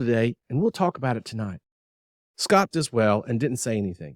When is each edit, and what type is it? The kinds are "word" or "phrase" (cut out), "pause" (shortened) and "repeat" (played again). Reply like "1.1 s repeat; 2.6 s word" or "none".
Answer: 2.7 s word